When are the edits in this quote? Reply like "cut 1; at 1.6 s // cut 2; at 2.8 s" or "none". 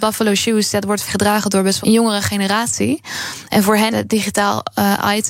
cut 1; at 1.0 s // cut 2; at 1.8 s // cut 3; at 3.9 s